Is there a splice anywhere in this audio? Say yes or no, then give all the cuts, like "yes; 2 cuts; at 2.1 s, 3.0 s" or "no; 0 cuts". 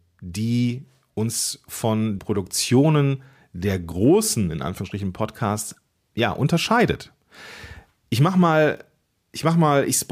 yes; 1 cut; at 2.2 s